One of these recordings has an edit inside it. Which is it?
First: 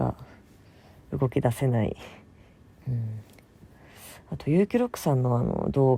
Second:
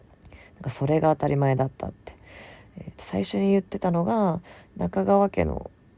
first; 1 cut; at 2.7 s

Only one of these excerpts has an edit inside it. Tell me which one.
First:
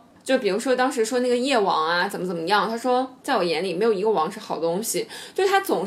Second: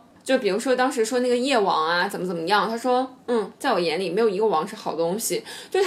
first; 1 cut; at 3.2 s

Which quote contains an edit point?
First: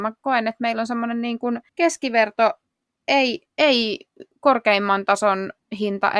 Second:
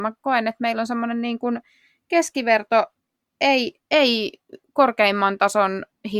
first; 1 cut; at 1.7 s

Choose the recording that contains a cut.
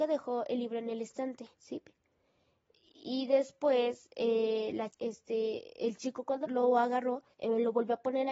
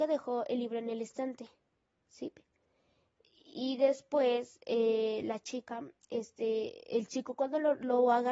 first; 4 cuts; at 1.5 s, 4.9 s, 6.4 s, 7.3 s

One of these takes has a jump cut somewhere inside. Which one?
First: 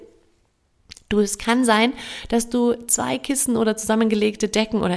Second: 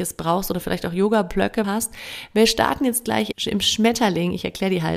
second; 2 cuts; at 1.6 s, 3.3 s

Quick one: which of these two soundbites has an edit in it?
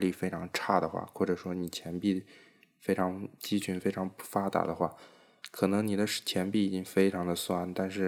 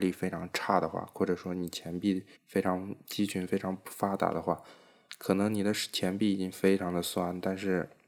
second; 1 cut; at 2.4 s

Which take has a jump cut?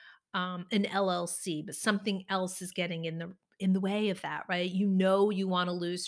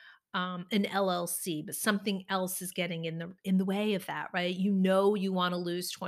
second; 1 cut; at 3.4 s

